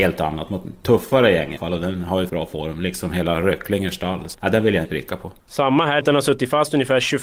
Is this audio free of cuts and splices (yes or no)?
no